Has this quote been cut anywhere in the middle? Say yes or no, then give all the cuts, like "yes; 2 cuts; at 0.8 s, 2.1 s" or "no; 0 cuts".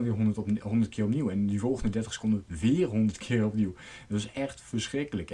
no; 0 cuts